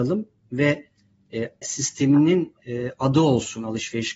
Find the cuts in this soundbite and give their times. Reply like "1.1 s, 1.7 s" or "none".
1.6 s